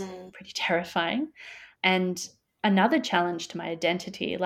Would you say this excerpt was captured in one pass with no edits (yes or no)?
yes